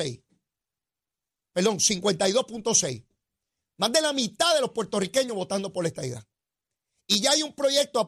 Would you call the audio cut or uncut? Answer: uncut